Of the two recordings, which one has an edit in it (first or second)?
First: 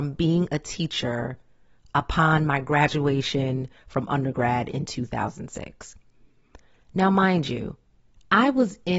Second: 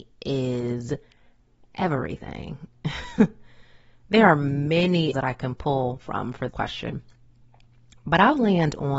second